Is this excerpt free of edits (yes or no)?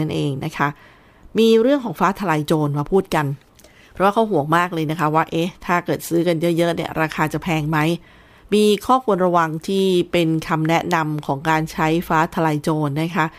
no